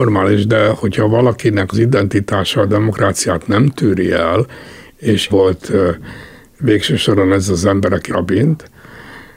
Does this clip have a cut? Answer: yes; 3 cuts; at 1.7 s, 5.3 s, 8.1 s

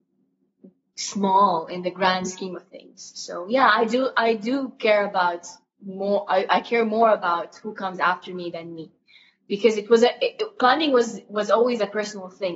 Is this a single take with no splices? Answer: yes; 0 cuts

